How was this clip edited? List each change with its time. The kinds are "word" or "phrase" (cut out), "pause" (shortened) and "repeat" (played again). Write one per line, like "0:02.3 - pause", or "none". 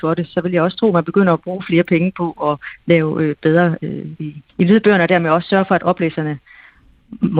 0:04.2 - word
0:04.5 - pause